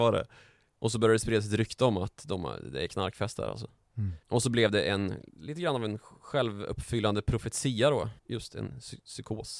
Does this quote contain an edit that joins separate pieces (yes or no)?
yes